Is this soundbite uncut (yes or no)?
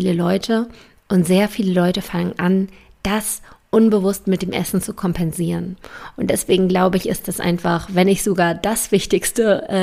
yes